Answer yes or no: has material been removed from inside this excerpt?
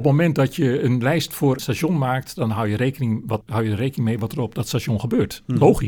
yes